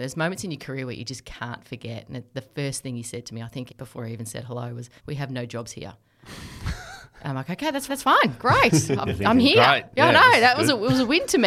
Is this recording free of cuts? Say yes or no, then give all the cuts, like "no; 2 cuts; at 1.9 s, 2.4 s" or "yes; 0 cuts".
no; 3 cuts; at 3.7 s, 5.0 s, 7.9 s